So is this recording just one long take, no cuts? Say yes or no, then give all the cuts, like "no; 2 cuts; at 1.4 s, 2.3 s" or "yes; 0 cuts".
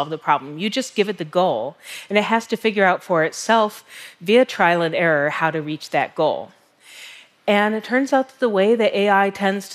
yes; 0 cuts